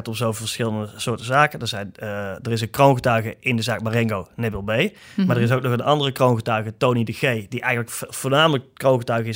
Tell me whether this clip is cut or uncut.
uncut